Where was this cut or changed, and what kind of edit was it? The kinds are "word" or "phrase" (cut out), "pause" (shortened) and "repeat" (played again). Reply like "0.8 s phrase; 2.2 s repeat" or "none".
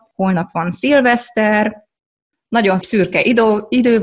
2.8 s word